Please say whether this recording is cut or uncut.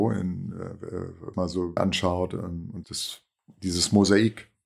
cut